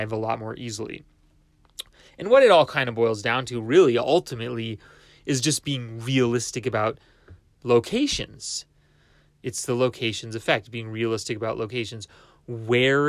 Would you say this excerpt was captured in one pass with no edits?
yes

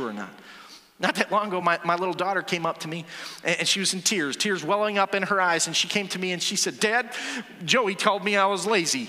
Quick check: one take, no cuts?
yes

